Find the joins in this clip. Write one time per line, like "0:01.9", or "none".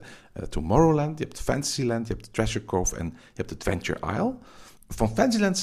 none